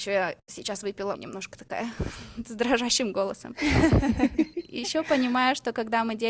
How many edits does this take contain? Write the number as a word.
one